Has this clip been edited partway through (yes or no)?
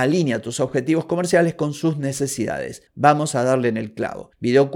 no